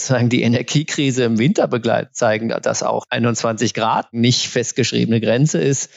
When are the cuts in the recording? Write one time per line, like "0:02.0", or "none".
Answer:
none